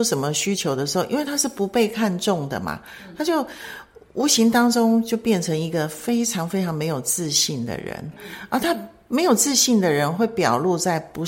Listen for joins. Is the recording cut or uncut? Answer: uncut